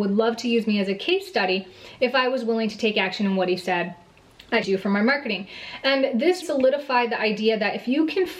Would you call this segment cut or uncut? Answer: cut